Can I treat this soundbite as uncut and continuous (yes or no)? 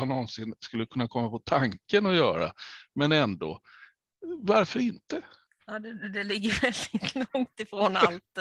yes